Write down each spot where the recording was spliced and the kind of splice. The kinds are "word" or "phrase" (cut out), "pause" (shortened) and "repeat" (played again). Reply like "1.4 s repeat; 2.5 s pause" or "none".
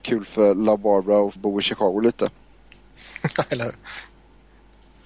1.4 s word